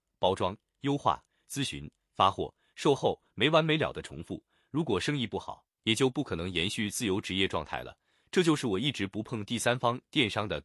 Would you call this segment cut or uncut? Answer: uncut